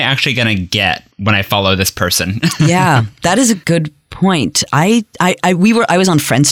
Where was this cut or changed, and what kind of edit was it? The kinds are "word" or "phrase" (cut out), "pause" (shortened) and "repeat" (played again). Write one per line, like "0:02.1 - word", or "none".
0:01.1 - pause